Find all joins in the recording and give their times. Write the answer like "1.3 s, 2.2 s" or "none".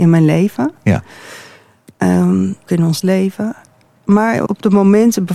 2.7 s, 3.0 s, 4.5 s